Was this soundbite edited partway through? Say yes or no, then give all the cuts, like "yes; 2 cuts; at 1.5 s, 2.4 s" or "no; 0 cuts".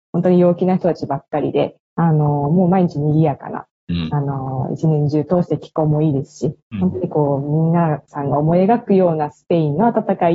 yes; 1 cut; at 1.8 s